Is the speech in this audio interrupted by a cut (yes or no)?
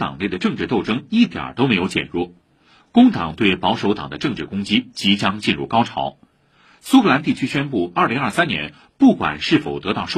no